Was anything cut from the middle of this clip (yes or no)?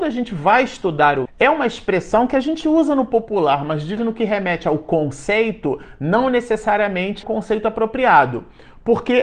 yes